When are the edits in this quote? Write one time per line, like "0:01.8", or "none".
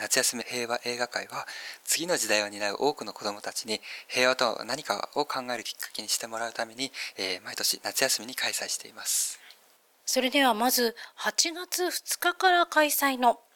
none